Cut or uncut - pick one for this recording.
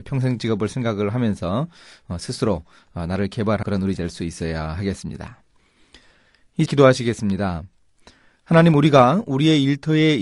cut